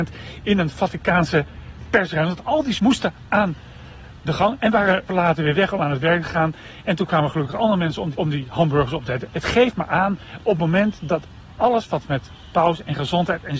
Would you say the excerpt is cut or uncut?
cut